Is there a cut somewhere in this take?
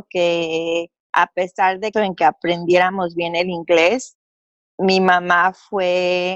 yes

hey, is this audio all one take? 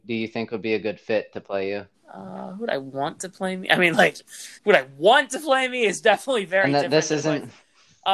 no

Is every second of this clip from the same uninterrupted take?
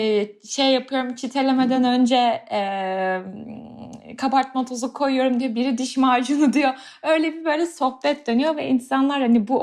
yes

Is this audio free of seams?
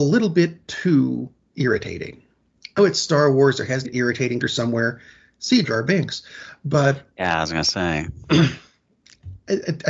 no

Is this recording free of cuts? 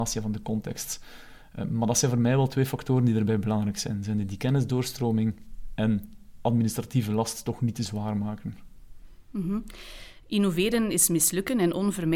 no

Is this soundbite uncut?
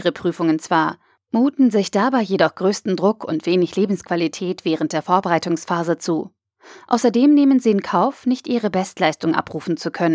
yes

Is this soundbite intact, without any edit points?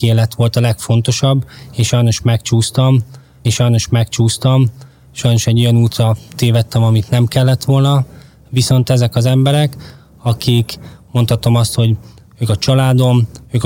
no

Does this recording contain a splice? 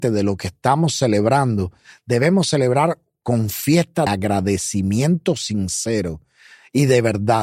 yes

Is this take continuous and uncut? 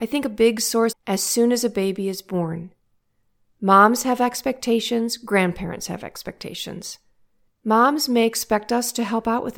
no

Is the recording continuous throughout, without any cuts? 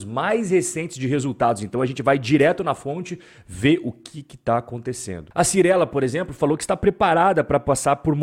yes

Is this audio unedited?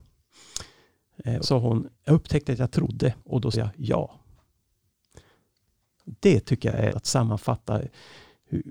no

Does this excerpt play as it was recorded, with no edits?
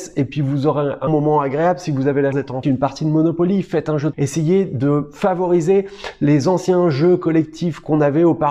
no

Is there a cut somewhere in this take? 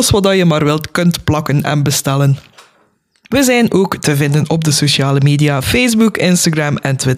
no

